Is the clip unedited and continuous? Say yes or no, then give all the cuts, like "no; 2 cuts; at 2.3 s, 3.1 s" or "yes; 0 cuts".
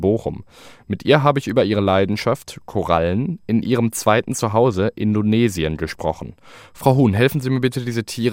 yes; 0 cuts